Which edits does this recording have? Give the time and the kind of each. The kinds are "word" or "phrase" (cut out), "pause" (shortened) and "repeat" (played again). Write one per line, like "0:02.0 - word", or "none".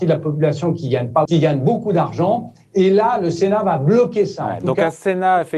0:01.3 - word